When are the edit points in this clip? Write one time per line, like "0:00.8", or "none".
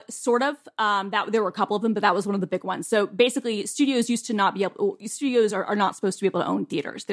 none